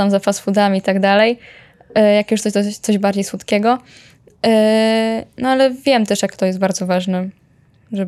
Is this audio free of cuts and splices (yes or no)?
yes